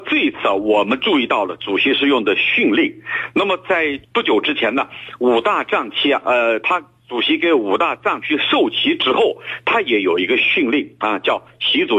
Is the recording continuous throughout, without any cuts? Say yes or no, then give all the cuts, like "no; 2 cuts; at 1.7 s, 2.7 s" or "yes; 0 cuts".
yes; 0 cuts